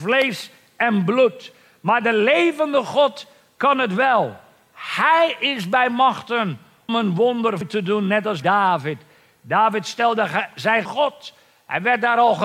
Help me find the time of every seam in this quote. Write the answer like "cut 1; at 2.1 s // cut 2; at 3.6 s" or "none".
cut 1; at 6.9 s // cut 2; at 7.6 s // cut 3; at 8.4 s // cut 4; at 10.8 s